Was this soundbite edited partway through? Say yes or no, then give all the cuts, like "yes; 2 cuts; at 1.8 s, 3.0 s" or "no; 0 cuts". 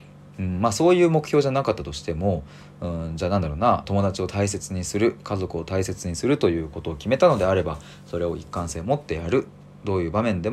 yes; 1 cut; at 3.8 s